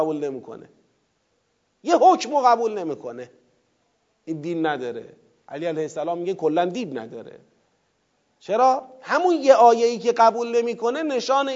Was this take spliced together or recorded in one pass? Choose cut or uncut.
uncut